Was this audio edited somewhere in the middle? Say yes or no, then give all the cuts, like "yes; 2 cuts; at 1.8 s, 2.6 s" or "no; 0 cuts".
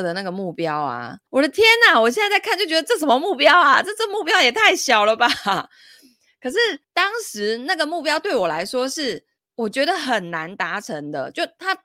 yes; 3 cuts; at 1.3 s, 6.8 s, 9.4 s